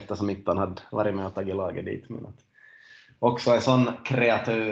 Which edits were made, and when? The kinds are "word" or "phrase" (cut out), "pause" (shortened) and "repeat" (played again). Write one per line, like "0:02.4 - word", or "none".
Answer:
none